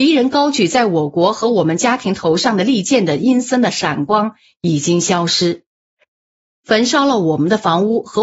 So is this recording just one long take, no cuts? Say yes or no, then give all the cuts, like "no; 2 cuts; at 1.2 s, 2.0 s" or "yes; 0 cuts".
yes; 0 cuts